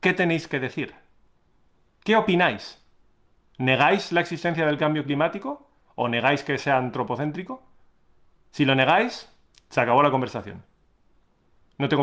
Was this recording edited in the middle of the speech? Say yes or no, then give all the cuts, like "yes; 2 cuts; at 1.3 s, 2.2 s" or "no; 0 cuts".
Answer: yes; 1 cut; at 9.5 s